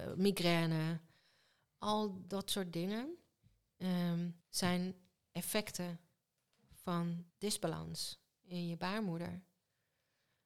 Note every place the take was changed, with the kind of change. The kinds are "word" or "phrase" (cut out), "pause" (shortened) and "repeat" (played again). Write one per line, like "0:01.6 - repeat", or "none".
0:04.4 - pause
0:07.3 - pause